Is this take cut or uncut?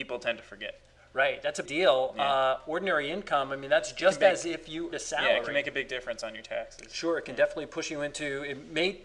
cut